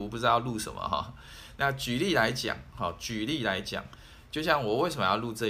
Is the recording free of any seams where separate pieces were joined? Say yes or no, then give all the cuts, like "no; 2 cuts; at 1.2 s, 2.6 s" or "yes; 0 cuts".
yes; 0 cuts